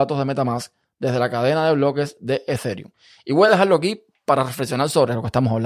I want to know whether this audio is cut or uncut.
uncut